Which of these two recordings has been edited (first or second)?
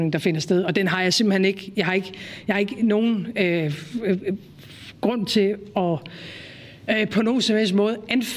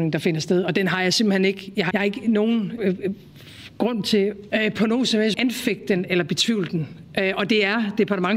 second